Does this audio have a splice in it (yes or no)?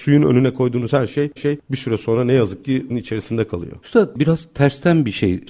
yes